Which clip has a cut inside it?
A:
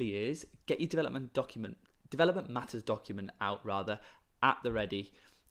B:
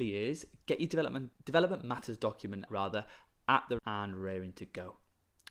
B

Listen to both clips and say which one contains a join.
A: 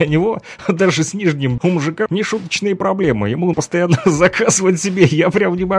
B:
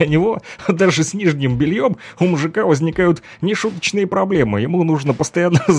A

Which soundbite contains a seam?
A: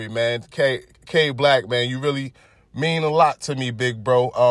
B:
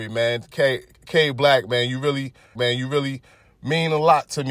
B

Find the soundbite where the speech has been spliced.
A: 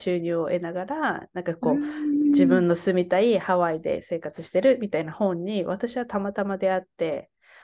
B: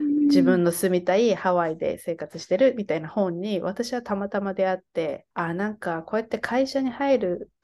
B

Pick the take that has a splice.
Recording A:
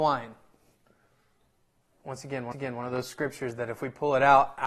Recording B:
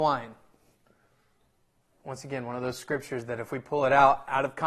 A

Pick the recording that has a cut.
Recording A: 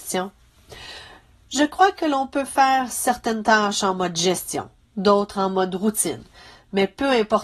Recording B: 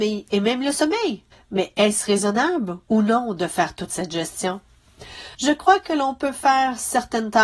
B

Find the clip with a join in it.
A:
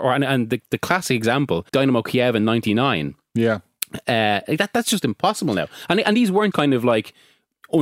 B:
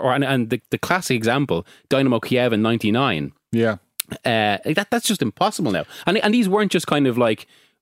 A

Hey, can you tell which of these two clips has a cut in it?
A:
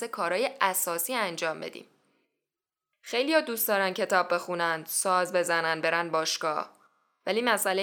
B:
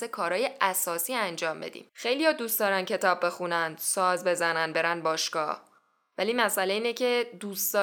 B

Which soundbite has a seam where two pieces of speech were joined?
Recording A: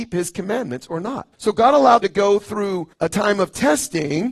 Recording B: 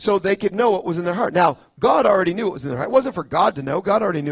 A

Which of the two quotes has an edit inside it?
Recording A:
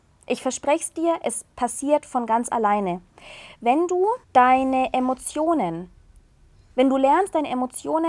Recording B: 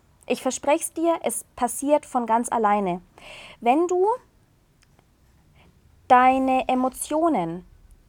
A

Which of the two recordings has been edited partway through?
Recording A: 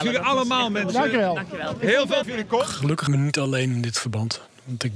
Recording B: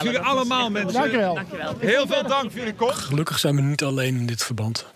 A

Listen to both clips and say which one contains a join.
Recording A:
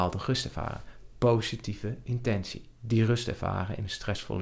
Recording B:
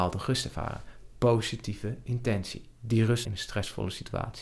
B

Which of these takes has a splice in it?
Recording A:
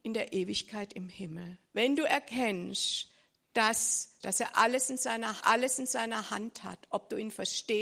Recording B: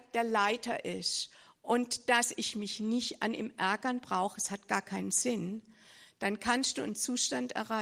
A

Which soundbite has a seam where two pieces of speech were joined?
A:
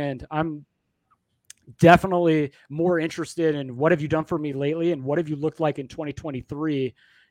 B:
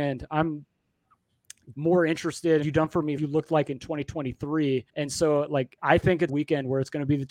B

